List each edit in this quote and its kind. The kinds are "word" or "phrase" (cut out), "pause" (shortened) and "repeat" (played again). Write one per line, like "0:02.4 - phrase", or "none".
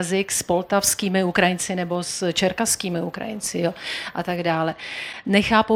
none